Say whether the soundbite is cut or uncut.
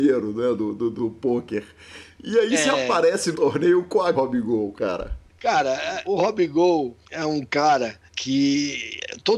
cut